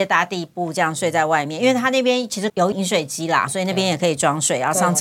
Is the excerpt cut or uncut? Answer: cut